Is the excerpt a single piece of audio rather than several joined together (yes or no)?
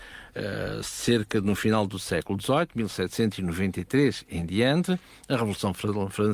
yes